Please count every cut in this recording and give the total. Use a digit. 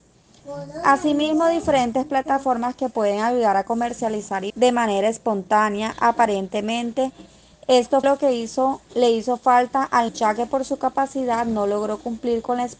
4